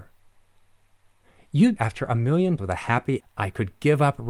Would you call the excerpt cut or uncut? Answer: cut